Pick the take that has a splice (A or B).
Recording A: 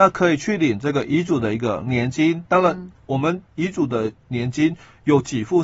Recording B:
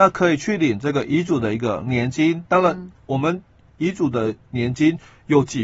A